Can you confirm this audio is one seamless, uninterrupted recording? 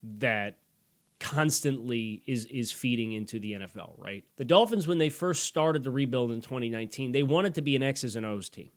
no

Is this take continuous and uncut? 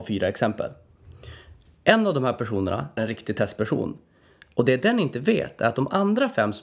no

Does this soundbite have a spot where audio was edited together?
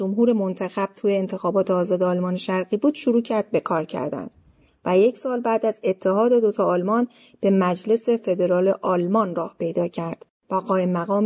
no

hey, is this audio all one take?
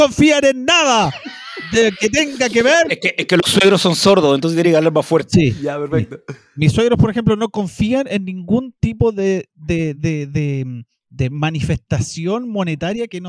yes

